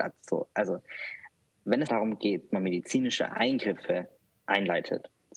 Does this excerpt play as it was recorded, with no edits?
no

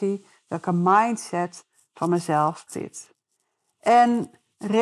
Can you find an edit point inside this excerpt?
yes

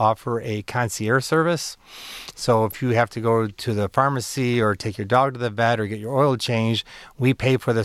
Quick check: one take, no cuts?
yes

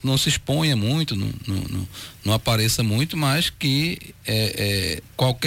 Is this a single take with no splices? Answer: yes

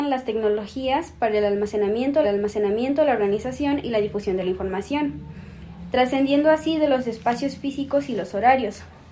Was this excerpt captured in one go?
no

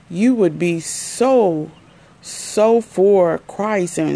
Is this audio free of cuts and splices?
yes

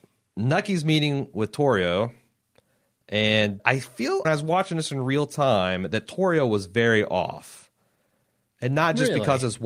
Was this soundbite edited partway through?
yes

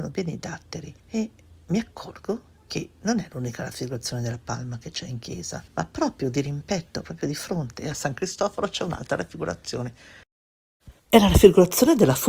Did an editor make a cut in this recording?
yes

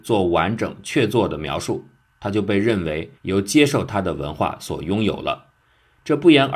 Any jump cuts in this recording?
yes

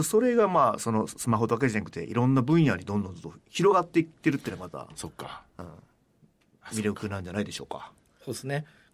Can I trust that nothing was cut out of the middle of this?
yes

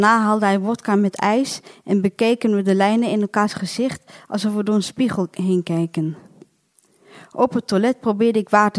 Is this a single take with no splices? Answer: yes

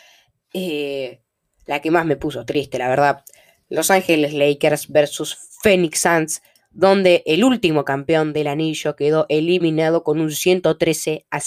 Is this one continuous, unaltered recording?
yes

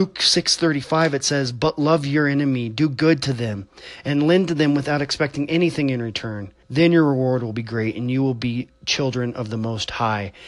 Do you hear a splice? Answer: yes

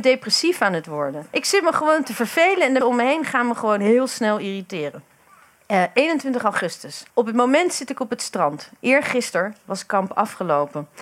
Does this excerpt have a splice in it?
yes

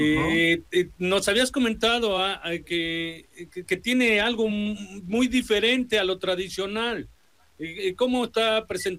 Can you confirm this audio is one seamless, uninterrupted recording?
yes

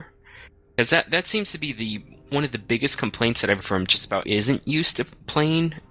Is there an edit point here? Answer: yes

